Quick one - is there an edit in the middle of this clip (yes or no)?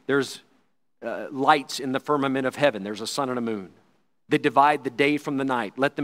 no